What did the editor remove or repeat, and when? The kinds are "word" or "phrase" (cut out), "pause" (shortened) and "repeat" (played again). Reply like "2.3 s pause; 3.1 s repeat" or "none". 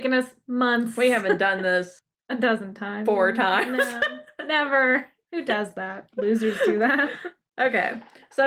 2.0 s pause